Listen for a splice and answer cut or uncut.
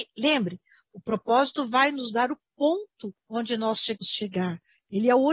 cut